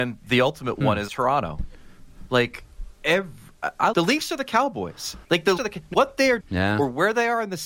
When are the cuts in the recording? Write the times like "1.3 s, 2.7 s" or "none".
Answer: 1.1 s, 3.9 s, 5.2 s, 5.6 s, 5.9 s, 6.4 s